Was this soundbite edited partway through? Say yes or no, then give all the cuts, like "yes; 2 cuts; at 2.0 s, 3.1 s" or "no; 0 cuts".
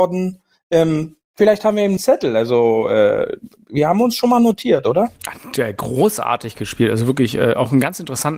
yes; 1 cut; at 2.0 s